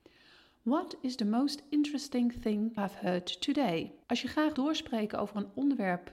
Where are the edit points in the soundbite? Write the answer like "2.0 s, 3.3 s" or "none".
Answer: 2.8 s, 4.0 s, 4.5 s